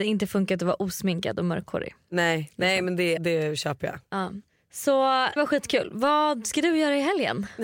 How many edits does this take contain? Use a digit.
2